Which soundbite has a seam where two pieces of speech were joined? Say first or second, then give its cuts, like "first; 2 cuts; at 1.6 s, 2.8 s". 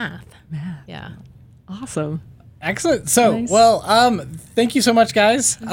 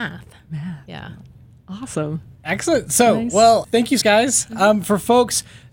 second; 3 cuts; at 2.4 s, 3.6 s, 4.0 s